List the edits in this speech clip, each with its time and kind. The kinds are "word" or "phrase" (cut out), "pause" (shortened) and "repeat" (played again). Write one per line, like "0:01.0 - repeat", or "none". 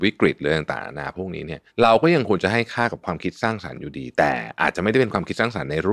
0:01.7 - pause